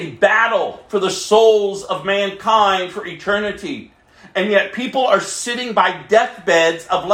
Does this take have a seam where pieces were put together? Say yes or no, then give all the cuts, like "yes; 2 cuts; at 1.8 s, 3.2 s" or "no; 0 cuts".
no; 0 cuts